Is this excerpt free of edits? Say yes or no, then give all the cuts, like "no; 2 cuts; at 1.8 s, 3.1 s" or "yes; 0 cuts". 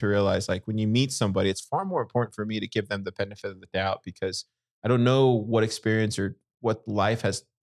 yes; 0 cuts